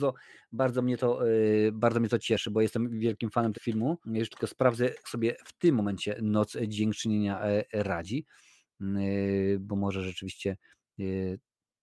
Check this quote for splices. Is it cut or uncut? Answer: cut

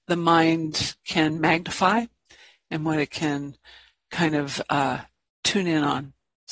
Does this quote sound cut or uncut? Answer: uncut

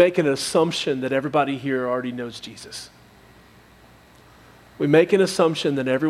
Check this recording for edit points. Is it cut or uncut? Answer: uncut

